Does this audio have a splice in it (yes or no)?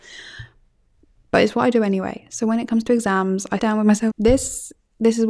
yes